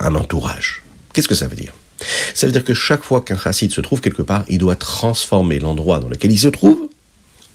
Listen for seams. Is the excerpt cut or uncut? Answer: uncut